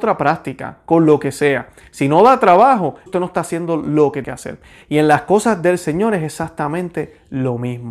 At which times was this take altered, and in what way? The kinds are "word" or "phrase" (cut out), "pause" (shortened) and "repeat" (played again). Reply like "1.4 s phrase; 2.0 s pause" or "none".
3.1 s word; 4.2 s word